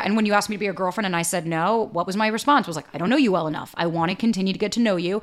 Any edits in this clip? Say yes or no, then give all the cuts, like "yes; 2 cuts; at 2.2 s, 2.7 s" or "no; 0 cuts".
no; 0 cuts